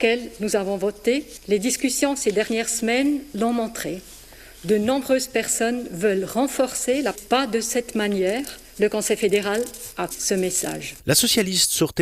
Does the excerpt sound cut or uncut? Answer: cut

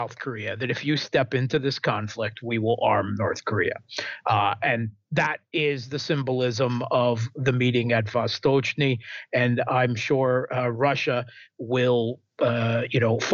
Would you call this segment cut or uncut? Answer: uncut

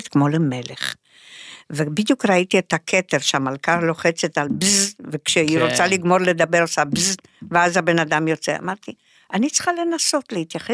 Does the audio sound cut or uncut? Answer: uncut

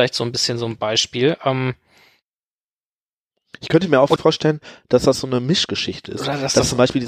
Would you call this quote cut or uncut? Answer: cut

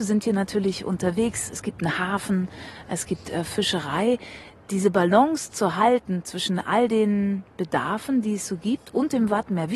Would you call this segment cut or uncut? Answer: cut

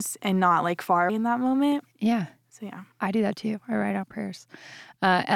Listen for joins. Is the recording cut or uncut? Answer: cut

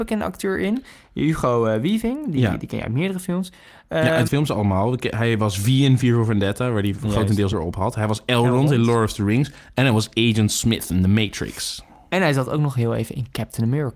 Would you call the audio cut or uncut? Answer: cut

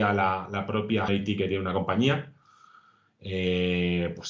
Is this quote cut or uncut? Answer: cut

